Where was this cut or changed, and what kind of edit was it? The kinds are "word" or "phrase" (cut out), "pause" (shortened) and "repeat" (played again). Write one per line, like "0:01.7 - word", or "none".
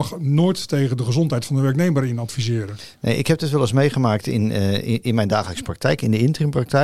none